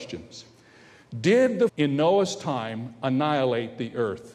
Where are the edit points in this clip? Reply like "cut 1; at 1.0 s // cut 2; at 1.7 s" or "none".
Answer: cut 1; at 1.7 s